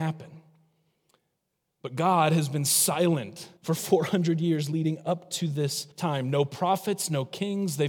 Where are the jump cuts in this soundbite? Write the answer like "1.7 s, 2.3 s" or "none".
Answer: 3.6 s, 5.9 s